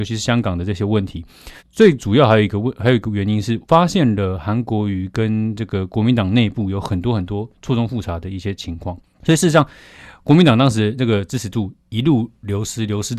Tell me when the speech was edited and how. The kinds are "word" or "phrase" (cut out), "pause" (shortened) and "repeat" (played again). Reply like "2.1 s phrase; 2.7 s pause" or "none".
1.6 s pause; 3.6 s pause